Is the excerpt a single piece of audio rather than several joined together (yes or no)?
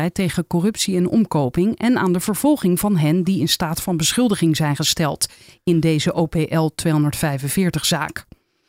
yes